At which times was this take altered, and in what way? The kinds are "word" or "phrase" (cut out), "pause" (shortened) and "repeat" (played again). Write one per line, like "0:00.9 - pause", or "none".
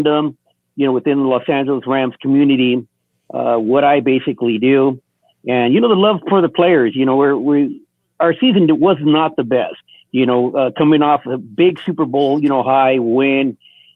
0:09.9 - pause